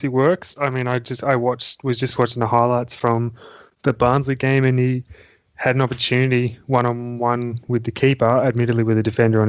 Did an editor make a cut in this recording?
no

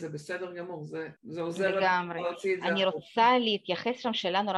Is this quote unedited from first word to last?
no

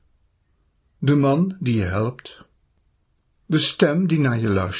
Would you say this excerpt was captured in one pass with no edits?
yes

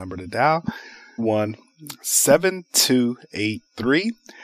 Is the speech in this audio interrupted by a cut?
yes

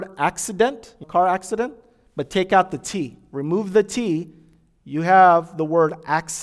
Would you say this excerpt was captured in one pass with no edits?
no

